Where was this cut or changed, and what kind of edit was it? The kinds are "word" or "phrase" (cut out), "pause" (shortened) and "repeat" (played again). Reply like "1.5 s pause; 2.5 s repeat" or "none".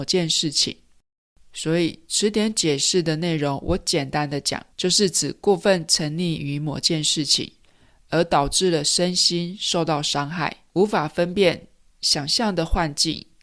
1.2 s pause; 4.7 s pause; 10.7 s pause